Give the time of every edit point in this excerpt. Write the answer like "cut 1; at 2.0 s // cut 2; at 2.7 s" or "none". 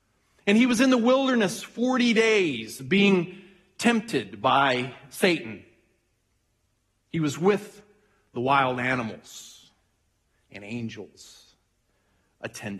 none